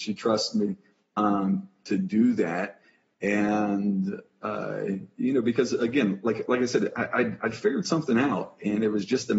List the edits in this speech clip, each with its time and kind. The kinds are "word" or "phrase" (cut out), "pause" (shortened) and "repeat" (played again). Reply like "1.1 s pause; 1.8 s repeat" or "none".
none